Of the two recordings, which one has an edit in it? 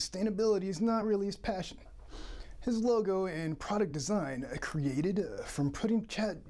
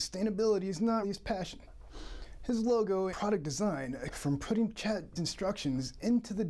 second; 4 cuts; at 1.0 s, 3.1 s, 4.1 s, 5.2 s

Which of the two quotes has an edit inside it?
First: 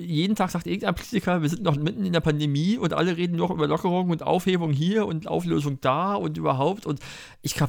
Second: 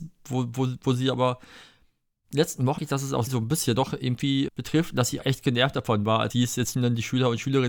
second; 7 cuts; at 2.8 s, 3.3 s, 3.7 s, 4.5 s, 5.2 s, 6.3 s, 6.7 s

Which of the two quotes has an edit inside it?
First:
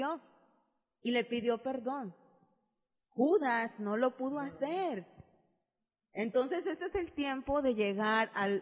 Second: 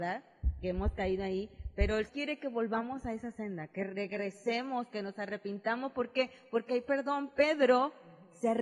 second; 1 cut; at 2.1 s

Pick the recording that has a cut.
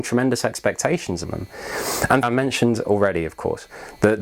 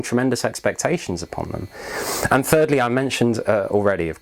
first; 3 cuts; at 1.2 s, 2.2 s, 2.8 s

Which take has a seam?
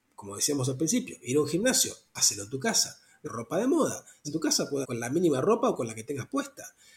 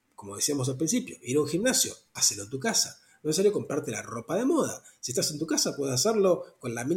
first; 3 cuts; at 3.2 s, 4.2 s, 4.8 s

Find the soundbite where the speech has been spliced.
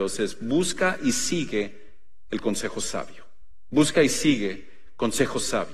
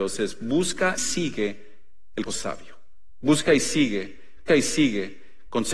second; 3 cuts; at 1.0 s, 2.3 s, 4.5 s

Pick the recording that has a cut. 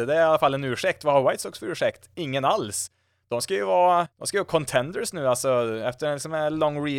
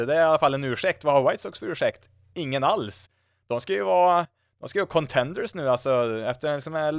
first; 2 cuts; at 2.1 s, 4.1 s

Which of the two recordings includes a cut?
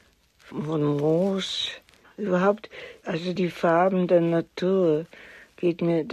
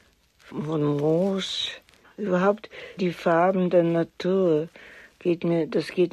second; 1 cut; at 3.0 s

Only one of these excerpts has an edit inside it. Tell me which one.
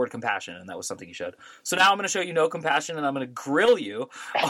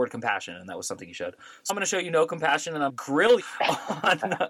second; 3 cuts; at 1.7 s, 2.9 s, 3.4 s

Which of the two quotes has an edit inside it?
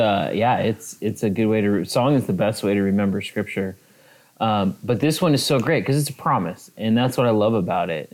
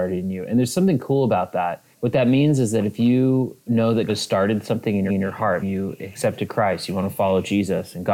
second; 5 cuts; at 1.9 s, 3.6 s, 4.1 s, 5.1 s, 5.6 s

